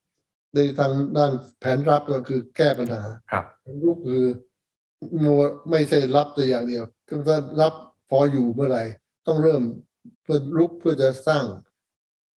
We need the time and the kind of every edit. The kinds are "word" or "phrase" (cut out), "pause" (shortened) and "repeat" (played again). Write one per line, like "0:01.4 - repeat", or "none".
0:03.2 - pause
0:07.0 - pause
0:10.1 - pause